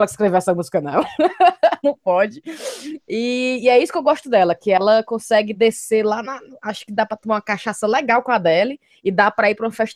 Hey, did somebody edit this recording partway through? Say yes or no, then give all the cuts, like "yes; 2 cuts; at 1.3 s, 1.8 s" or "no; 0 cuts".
no; 0 cuts